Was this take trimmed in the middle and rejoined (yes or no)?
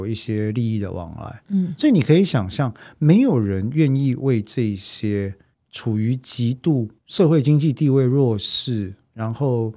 yes